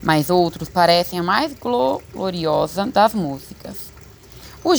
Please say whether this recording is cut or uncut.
uncut